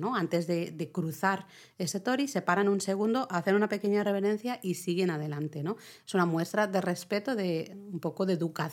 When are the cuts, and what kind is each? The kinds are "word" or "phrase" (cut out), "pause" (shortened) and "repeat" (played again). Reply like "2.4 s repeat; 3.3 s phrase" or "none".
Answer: none